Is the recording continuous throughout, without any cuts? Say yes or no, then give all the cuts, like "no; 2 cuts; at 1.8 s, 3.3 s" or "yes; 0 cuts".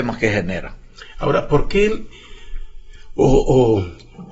yes; 0 cuts